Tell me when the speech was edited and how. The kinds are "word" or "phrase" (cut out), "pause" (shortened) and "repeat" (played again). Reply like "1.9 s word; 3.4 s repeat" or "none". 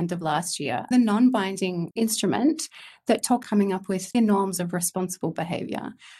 0.9 s word; 3.4 s word; 4.1 s word